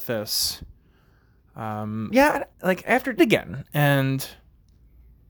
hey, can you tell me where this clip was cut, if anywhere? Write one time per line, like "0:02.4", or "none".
0:02.1
0:02.5
0:03.2

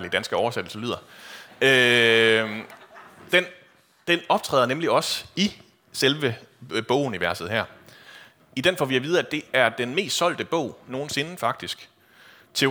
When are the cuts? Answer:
none

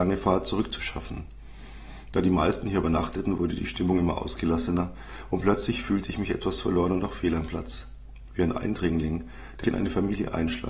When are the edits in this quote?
0:09.6

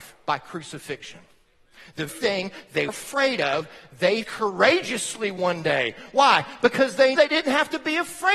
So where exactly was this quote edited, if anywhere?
0:02.1
0:02.9
0:04.2
0:07.2

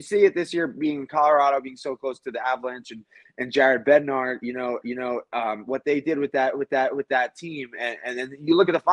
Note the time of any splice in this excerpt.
0:04.8
0:06.7

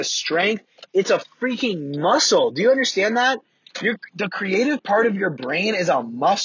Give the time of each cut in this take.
none

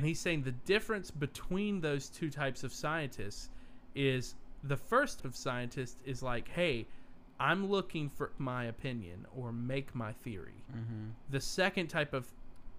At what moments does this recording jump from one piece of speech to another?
0:05.2
0:08.4

